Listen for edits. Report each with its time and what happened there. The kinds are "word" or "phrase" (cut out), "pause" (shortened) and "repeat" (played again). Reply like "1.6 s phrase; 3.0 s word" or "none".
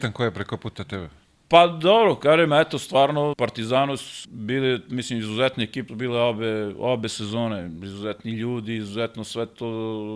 3.3 s word; 4.2 s word; 5.9 s word